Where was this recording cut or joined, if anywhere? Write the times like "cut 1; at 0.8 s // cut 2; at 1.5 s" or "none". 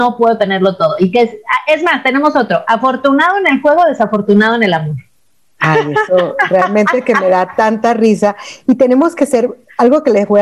none